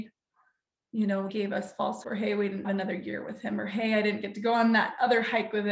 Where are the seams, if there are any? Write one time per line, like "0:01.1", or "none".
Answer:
0:01.3
0:02.0
0:02.6